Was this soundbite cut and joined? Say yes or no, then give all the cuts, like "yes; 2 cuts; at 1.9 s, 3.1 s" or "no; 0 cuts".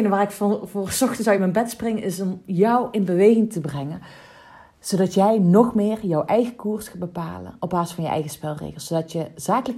no; 0 cuts